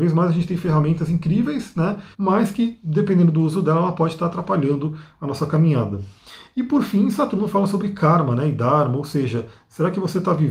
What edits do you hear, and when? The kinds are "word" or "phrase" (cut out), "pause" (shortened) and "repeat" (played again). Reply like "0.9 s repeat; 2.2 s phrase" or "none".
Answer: 2.1 s pause